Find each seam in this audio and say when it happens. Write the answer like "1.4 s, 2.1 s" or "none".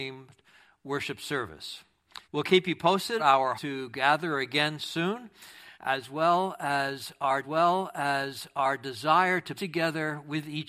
2.2 s, 3.2 s, 3.5 s, 5.7 s, 7.4 s, 9.5 s